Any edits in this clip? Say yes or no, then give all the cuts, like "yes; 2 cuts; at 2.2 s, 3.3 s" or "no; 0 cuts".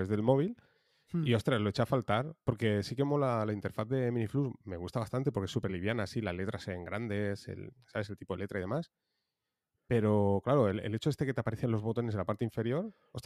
no; 0 cuts